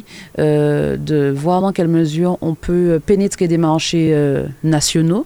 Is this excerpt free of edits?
yes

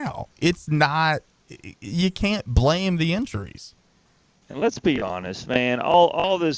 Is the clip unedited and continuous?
yes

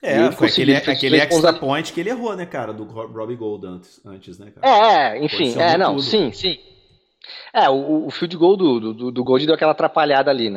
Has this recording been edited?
no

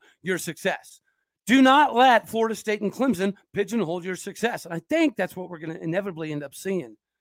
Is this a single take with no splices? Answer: no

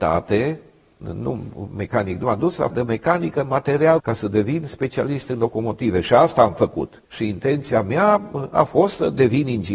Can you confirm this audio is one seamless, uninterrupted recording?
no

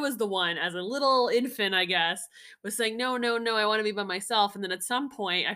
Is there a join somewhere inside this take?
no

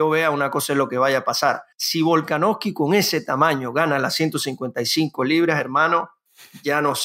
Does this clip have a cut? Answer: yes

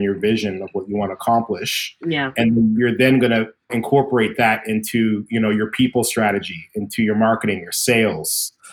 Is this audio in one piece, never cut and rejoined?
no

